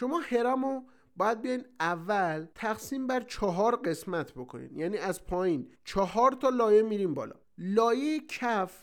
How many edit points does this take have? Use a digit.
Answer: 3